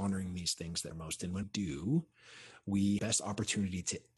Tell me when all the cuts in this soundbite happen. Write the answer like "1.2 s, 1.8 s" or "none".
0.9 s, 1.4 s, 3.0 s